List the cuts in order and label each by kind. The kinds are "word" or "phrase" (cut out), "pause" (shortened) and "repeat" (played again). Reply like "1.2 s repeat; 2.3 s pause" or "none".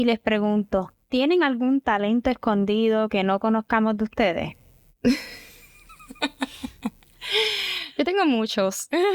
none

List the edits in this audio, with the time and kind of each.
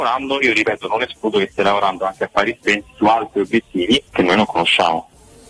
4.1 s pause

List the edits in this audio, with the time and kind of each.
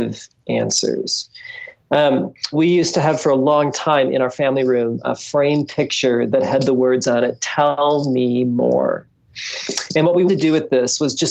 2.5 s word; 10.3 s word

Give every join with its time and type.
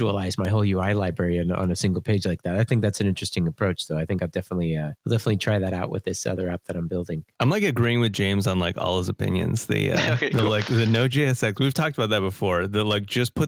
5.0 s pause

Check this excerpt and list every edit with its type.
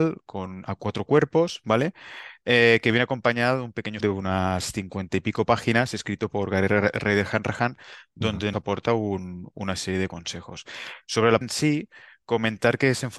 4.0 s word; 8.5 s word; 11.4 s word

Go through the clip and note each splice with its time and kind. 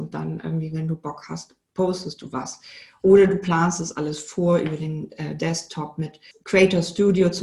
none

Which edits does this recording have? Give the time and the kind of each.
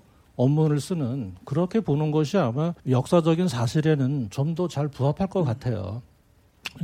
2.8 s pause

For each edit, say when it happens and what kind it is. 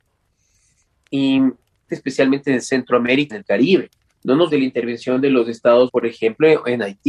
1.9 s phrase; 3.3 s word; 4.1 s pause; 4.5 s word; 5.9 s word

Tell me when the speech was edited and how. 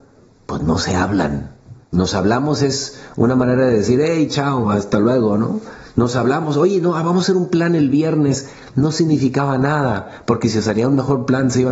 1.8 s pause

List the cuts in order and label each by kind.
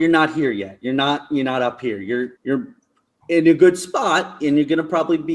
2.4 s pause

